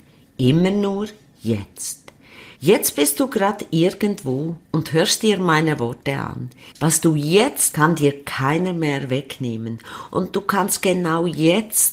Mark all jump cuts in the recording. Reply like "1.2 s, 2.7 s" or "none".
2.5 s, 7.7 s